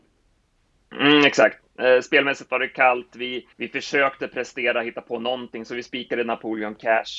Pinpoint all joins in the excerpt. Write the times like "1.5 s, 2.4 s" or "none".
3.5 s